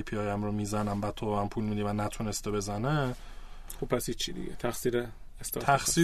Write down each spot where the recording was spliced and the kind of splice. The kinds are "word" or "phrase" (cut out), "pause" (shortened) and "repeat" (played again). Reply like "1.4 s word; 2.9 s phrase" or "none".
none